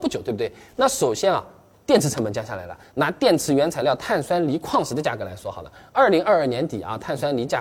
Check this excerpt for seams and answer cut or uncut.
uncut